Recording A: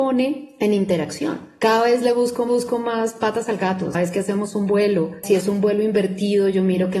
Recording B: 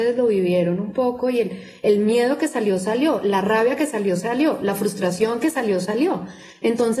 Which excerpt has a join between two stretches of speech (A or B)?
A